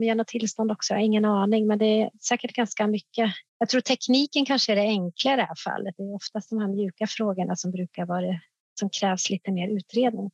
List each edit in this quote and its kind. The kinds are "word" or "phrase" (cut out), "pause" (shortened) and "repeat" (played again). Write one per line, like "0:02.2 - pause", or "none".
0:03.5 - pause
0:08.6 - pause